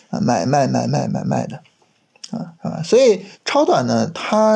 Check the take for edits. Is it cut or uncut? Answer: cut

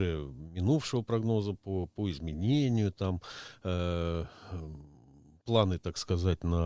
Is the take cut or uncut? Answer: uncut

